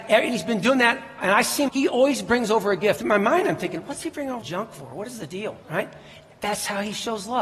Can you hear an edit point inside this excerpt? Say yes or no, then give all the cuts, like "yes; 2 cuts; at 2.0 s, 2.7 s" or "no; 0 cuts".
yes; 4 cuts; at 1.7 s, 3.0 s, 4.4 s, 5.6 s